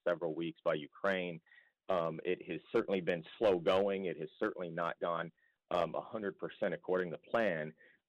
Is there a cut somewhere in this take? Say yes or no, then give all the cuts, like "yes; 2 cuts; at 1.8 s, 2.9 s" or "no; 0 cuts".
no; 0 cuts